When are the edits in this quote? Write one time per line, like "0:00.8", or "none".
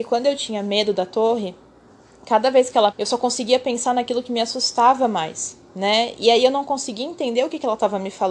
0:02.9